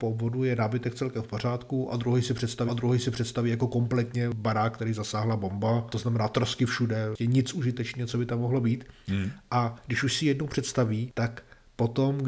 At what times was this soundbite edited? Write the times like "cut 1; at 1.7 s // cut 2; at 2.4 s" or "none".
cut 1; at 2.7 s